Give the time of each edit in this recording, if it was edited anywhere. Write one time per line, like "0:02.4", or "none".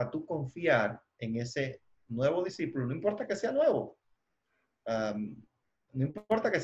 none